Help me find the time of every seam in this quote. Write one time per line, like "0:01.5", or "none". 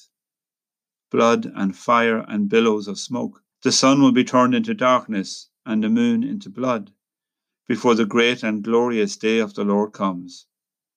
0:03.5